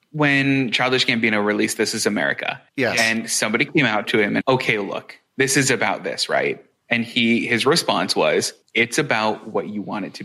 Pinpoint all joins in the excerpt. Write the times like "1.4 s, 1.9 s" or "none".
2.7 s, 4.0 s, 4.4 s, 5.3 s, 6.7 s, 8.6 s

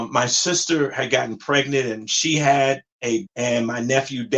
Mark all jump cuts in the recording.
3.3 s

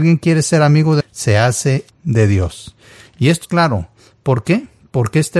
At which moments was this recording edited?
1.0 s, 1.9 s, 3.4 s

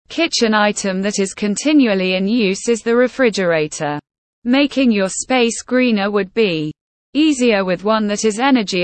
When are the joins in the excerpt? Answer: none

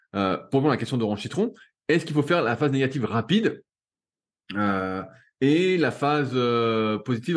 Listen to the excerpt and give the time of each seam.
none

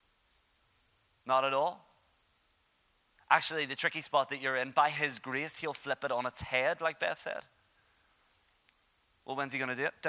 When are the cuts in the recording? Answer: none

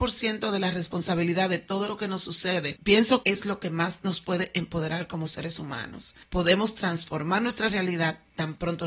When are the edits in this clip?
3.2 s

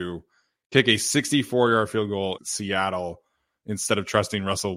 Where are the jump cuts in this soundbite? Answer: 2.4 s

